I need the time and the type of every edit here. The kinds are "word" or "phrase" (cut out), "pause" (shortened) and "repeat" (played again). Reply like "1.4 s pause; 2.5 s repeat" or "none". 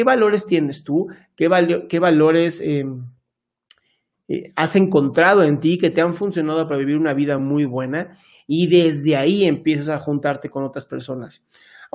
none